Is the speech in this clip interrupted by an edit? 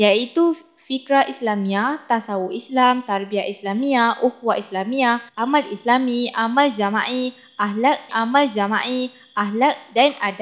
yes; 2 cuts; at 5.3 s, 8.1 s

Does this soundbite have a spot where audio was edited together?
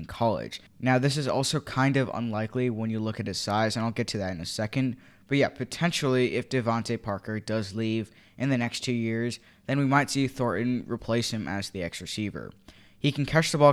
no; 0 cuts

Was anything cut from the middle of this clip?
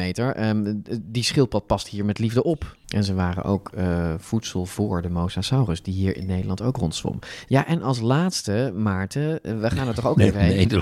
yes; 1 cut; at 2.8 s

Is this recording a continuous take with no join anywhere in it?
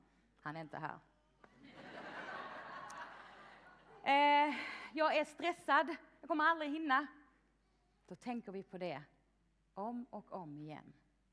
yes; 0 cuts

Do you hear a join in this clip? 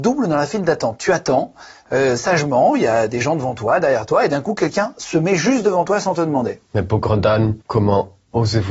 yes; 2 cuts; at 6.7 s, 7.6 s

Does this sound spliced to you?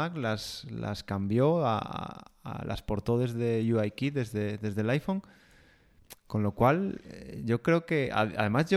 no; 0 cuts

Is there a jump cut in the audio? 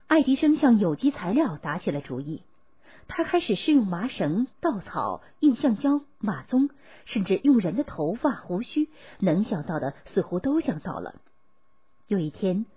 no; 0 cuts

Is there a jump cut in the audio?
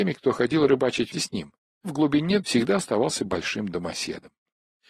yes; 3 cuts; at 1.1 s, 1.8 s, 2.4 s

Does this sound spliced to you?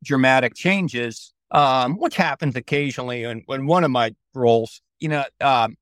yes; 2 cuts; at 1.4 s, 4.9 s

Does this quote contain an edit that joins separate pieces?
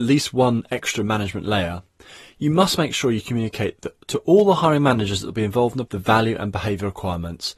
yes; 1 cut; at 5.8 s

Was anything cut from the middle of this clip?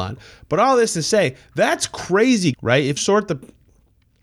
yes; 2 cuts; at 2.5 s, 3.0 s

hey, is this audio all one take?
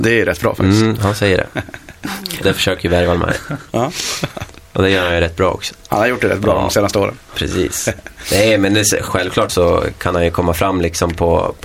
no; 3 cuts; at 2.4 s, 9.1 s, 9.5 s

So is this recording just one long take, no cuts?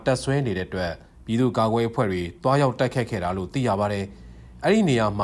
yes; 0 cuts

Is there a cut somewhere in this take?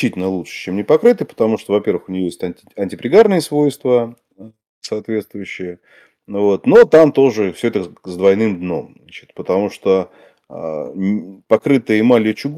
no; 0 cuts

